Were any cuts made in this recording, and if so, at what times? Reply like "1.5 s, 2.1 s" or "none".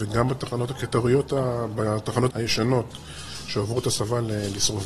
2.3 s